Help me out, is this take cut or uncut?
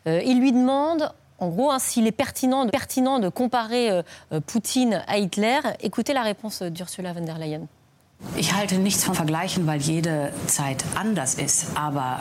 cut